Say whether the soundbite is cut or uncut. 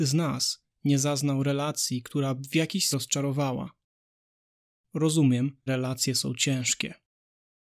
cut